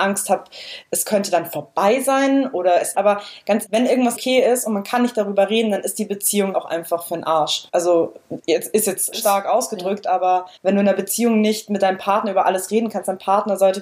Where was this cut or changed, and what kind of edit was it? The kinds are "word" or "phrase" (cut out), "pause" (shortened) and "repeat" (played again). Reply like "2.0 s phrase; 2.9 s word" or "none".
2.9 s word; 3.6 s word; 4.2 s word; 6.5 s word; 7.7 s pause; 9.1 s phrase; 10.6 s pause